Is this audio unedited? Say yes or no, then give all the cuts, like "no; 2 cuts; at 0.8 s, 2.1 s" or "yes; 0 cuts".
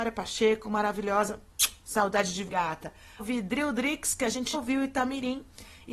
no; 3 cuts; at 2.5 s, 3.2 s, 4.5 s